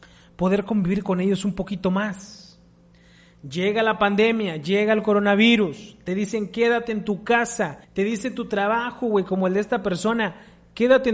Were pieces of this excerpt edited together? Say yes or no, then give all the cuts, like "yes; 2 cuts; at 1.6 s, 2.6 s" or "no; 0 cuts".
yes; 1 cut; at 7.8 s